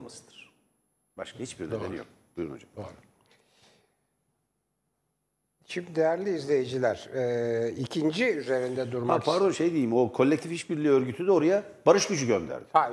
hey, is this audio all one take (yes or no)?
yes